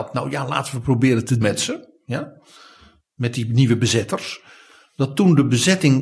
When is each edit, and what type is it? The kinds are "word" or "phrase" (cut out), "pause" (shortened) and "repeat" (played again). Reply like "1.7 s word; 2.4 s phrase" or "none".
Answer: 1.4 s word

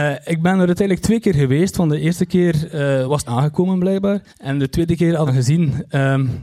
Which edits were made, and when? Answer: 3.2 s phrase; 4.3 s pause; 5.3 s phrase

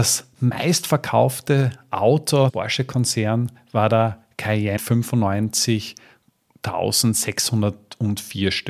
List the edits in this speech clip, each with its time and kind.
2.5 s word; 4.8 s word

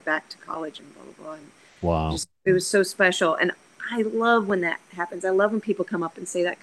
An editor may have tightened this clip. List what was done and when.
none

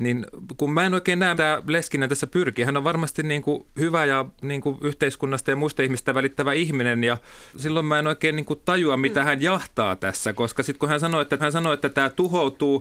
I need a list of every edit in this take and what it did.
1.3 s word; 7.5 s word; 11.4 s repeat

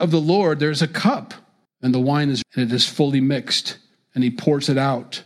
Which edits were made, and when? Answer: 1.7 s pause; 2.4 s word

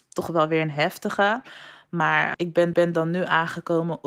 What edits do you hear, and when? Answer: 2.3 s word; 2.7 s repeat

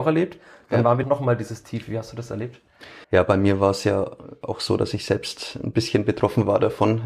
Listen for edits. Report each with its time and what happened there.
1.0 s phrase; 3.0 s pause

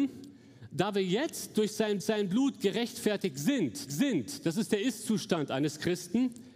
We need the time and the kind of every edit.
2.0 s repeat; 3.9 s repeat

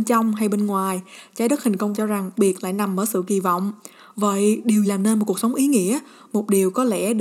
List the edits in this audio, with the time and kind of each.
1.9 s word; 2.3 s word; 4.9 s word

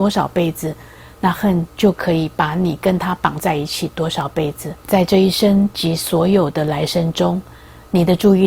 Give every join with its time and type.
4.8 s pause

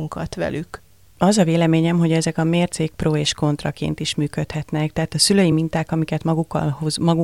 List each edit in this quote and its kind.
none

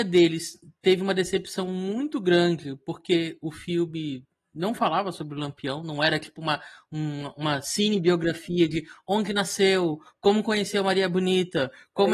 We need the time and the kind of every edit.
none

